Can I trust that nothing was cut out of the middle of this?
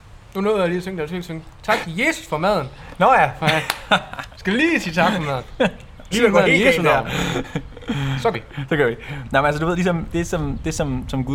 no; 3 cuts; at 6.1 s, 8.3 s, 10.1 s

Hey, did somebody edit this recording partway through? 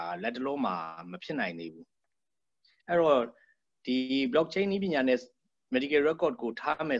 no; 0 cuts

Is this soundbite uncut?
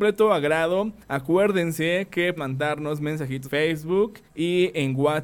no; 4 cuts; at 1.0 s, 2.4 s, 3.4 s, 4.2 s

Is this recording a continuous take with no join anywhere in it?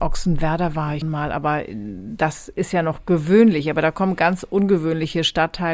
no; 1 cut; at 1.0 s

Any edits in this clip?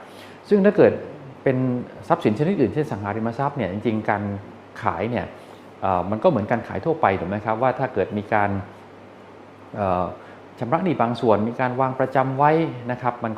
no; 0 cuts

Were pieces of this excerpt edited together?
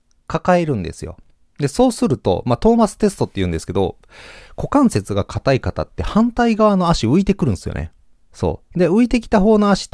no; 0 cuts

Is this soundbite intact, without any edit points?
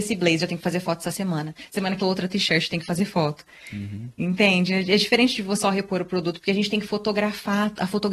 no; 2 cuts; at 2.0 s, 5.6 s

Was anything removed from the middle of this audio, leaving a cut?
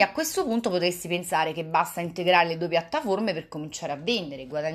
no; 0 cuts

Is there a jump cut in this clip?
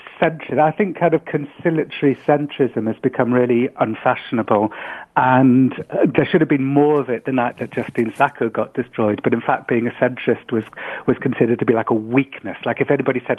no; 0 cuts

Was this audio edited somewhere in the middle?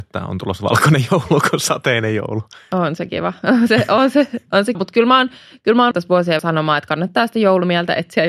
yes; 3 cuts; at 4.7 s, 5.9 s, 6.4 s

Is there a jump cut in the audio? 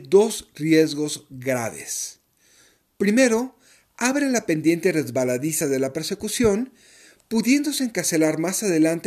no; 0 cuts

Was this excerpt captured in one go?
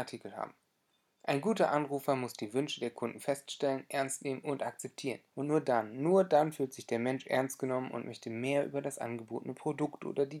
no; 1 cut; at 5.3 s

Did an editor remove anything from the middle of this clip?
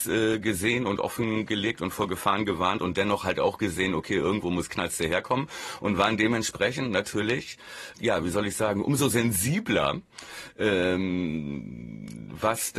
yes; 1 cut; at 7.9 s

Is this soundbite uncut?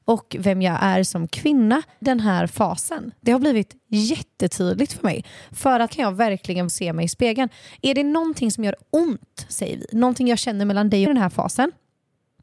no; 4 cuts; at 2.0 s, 5.9 s, 6.7 s, 11.1 s

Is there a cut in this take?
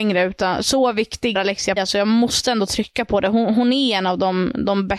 yes; 2 cuts; at 1.3 s, 1.8 s

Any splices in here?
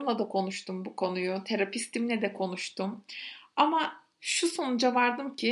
no; 0 cuts

